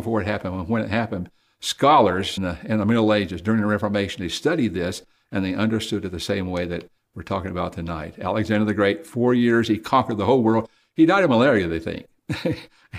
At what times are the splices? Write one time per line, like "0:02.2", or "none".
0:02.4